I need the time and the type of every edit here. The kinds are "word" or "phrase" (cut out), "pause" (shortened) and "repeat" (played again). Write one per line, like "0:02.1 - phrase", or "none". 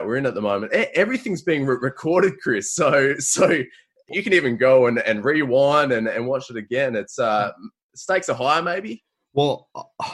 none